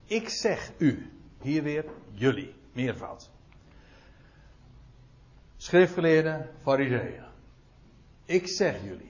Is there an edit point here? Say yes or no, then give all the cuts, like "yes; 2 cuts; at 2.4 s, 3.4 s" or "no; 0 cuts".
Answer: yes; 1 cut; at 1.4 s